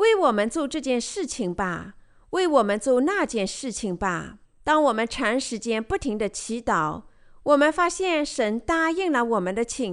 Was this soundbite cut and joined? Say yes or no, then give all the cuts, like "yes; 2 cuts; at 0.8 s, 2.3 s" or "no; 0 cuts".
yes; 1 cut; at 4.4 s